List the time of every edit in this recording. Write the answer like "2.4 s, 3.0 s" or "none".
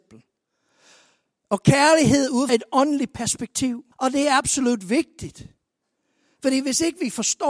2.5 s, 3.9 s